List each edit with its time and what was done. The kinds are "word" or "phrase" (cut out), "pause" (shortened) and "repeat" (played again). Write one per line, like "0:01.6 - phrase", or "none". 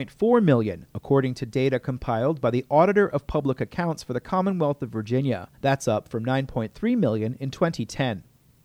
0:05.5 - pause